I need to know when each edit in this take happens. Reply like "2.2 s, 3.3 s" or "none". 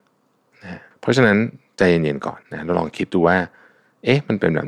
0.9 s, 2.4 s